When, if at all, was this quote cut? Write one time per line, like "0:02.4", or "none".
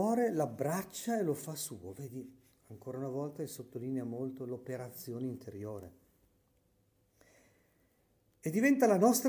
none